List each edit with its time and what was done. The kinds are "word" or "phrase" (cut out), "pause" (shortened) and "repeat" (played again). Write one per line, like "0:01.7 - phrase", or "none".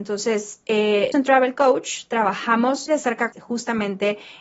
0:01.1 - word
0:02.9 - word
0:03.3 - phrase